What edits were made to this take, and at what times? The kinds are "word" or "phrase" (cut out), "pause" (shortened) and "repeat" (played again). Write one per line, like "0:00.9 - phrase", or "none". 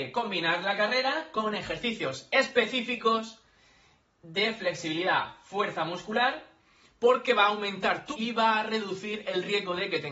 0:08.1 - word

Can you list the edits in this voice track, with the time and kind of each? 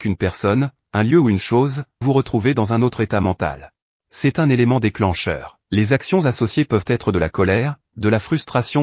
0:02.0 - word
0:03.8 - pause
0:05.6 - pause

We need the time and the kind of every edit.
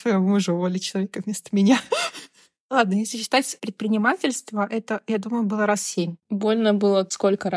none

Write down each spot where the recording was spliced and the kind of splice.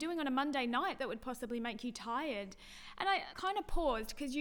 0:03.3 - word

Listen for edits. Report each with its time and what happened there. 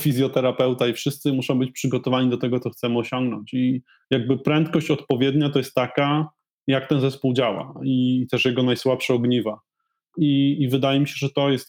none

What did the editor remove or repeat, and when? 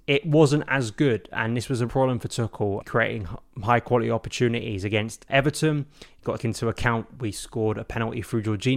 0:01.9 - word
0:02.8 - word
0:05.3 - word
0:06.4 - word

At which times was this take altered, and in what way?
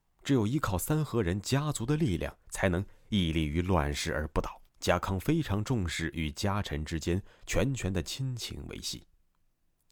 0:02.4 - pause
0:04.7 - pause

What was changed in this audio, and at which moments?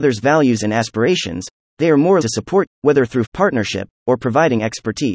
0:02.2 - word
0:02.7 - word
0:03.2 - word

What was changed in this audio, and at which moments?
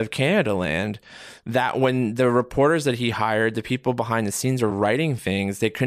none

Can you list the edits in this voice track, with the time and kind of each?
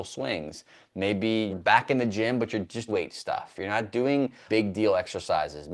0:01.5 - word
0:02.9 - phrase
0:04.5 - word

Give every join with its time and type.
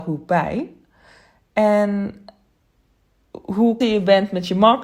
0:03.8 - word

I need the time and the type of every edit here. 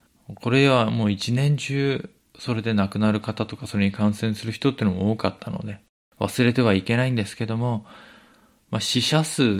none

